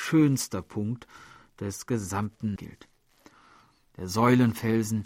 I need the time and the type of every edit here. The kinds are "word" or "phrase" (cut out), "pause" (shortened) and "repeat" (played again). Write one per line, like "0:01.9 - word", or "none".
0:02.6 - word